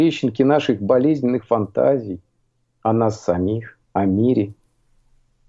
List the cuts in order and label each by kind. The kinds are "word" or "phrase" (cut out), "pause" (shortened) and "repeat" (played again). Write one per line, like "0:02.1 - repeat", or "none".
0:02.4 - pause
0:03.8 - pause